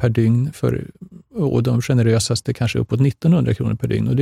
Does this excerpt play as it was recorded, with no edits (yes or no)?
yes